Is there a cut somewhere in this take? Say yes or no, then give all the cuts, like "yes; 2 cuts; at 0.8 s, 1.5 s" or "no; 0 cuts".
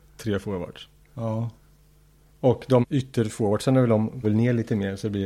yes; 2 cuts; at 2.8 s, 4.2 s